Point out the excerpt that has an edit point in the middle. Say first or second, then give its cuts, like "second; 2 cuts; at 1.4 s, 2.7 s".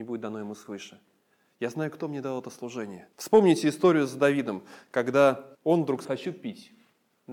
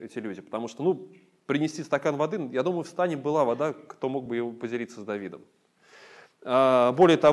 first; 3 cuts; at 3.1 s, 5.5 s, 6.0 s